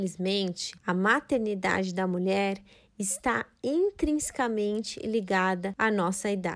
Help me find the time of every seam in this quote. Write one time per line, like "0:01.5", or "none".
none